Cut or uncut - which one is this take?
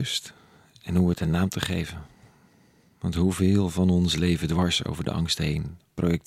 uncut